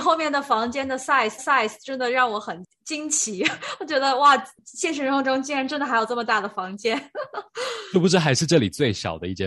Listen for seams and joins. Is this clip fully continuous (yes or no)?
no